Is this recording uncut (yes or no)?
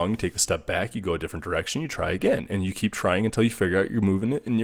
yes